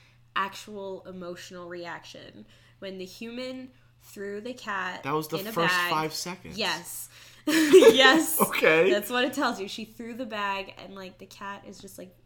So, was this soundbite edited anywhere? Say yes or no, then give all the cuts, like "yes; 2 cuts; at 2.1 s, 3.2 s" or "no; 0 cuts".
no; 0 cuts